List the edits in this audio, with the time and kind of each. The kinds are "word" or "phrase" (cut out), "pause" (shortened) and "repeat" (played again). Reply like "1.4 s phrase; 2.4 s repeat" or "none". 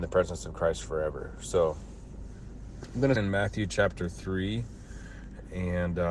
3.2 s word